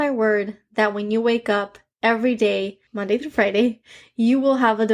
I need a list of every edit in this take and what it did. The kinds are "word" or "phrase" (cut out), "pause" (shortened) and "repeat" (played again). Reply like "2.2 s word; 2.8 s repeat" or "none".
2.9 s pause